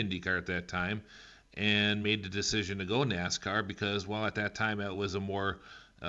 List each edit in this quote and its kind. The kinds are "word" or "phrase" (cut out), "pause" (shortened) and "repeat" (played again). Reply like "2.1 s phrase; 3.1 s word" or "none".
none

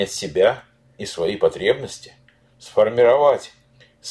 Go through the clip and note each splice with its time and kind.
1.0 s phrase

